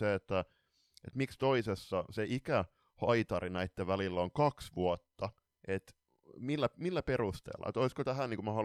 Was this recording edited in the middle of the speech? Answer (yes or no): no